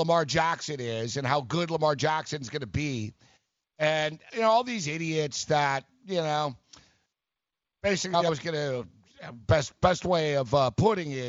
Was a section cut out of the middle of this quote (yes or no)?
no